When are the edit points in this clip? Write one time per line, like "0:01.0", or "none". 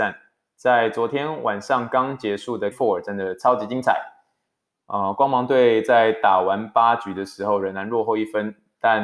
0:02.7